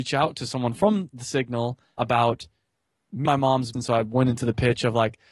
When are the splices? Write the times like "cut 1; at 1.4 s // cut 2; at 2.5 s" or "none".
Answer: cut 1; at 2.0 s // cut 2; at 3.3 s // cut 3; at 3.7 s